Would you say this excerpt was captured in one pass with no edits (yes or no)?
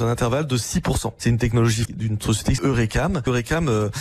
no